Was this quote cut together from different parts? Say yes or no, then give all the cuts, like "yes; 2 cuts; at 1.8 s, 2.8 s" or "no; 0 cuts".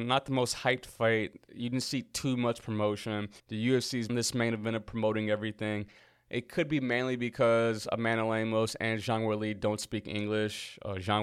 yes; 2 cuts; at 3.4 s, 4.1 s